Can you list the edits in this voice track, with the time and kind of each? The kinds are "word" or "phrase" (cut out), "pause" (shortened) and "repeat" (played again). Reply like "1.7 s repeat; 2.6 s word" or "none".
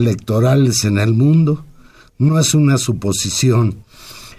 none